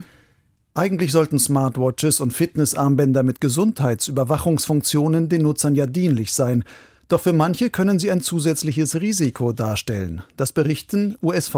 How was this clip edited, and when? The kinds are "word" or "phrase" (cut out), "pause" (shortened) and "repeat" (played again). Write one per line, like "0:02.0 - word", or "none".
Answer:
none